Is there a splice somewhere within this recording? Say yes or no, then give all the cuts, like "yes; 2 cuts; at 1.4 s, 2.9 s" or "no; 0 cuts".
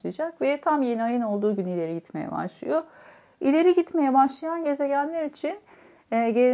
no; 0 cuts